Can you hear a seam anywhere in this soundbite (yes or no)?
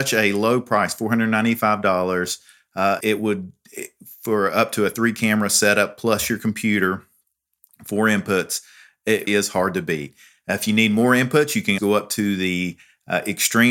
yes